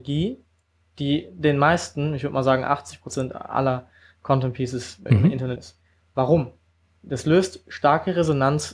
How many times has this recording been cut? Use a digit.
2